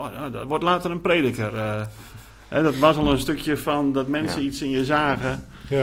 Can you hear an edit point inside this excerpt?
no; 0 cuts

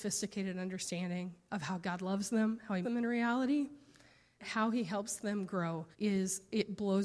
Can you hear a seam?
yes; 3 cuts; at 2.8 s, 4.4 s, 5.9 s

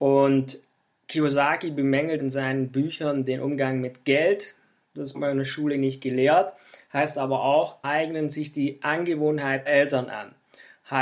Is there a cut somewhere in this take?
yes; 4 cuts; at 2.2 s, 5.1 s, 7.8 s, 9.7 s

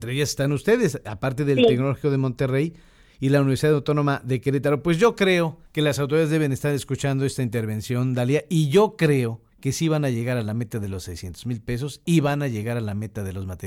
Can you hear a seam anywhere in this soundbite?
yes; 2 cuts; at 5.7 s, 9.5 s

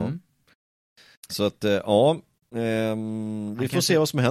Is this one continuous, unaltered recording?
yes; 0 cuts

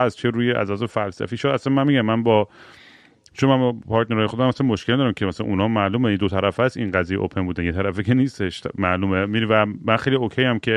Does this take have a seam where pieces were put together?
no; 0 cuts

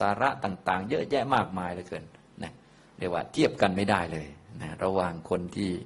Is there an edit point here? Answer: no; 0 cuts

